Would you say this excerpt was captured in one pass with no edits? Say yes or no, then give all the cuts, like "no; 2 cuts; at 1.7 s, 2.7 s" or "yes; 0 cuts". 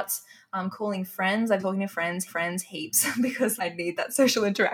no; 3 cuts; at 1.6 s, 2.3 s, 3.6 s